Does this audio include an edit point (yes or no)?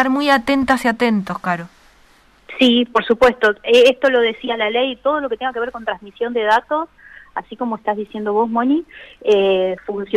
no